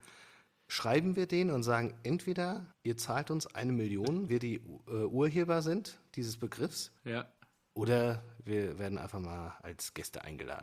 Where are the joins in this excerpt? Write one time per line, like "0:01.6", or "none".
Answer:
0:02.7
0:04.3
0:07.0